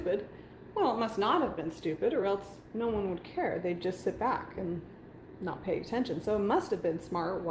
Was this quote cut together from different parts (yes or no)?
no